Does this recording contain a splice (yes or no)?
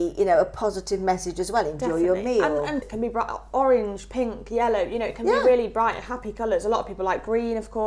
yes